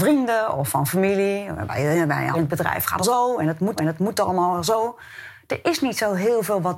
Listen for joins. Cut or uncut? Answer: cut